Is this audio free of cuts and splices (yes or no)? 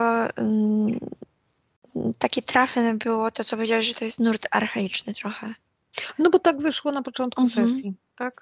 yes